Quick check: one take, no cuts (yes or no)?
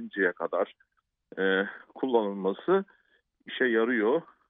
yes